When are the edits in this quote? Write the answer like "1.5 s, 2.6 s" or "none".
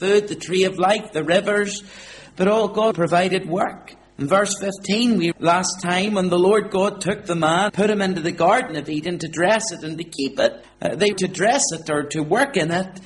2.9 s, 5.3 s, 7.7 s, 10.6 s, 11.1 s